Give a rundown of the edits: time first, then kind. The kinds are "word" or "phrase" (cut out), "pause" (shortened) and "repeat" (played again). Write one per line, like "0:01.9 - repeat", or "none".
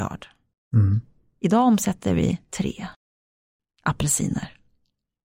none